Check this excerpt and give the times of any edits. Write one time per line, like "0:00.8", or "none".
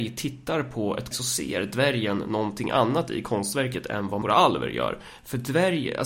0:01.1
0:04.2

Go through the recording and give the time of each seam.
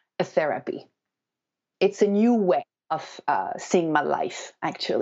none

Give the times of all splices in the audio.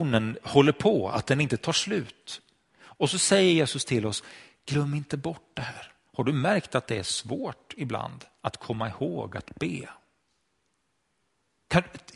none

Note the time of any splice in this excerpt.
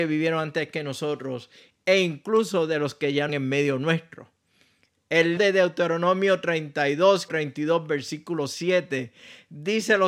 0:03.3
0:05.4
0:07.3

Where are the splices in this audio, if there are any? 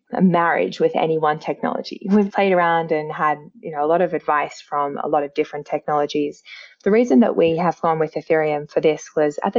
0:02.3

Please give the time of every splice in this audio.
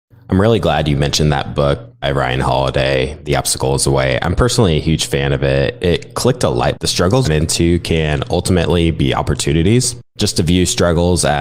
0:02.0
0:06.7
0:07.2
0:10.1

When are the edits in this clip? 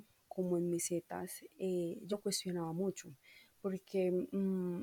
0:02.1

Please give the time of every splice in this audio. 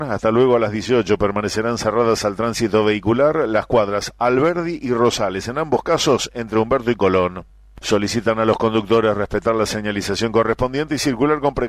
none

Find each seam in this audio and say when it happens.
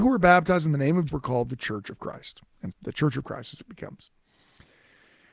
0:01.1
0:02.7

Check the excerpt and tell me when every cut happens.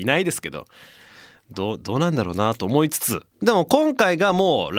0:03.3

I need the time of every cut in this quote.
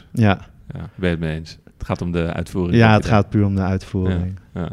0:00.9

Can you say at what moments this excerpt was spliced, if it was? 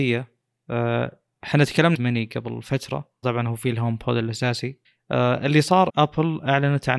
0:01.9
0:03.2
0:04.8
0:05.9

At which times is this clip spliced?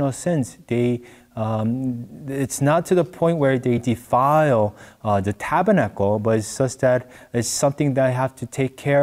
none

